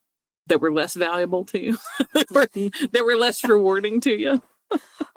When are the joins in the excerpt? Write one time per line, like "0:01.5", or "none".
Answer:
none